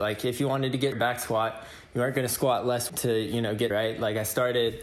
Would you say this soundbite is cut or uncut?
cut